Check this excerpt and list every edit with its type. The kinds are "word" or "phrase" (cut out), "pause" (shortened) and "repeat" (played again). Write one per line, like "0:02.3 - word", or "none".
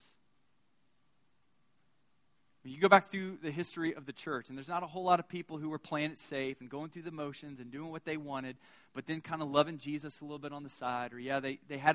none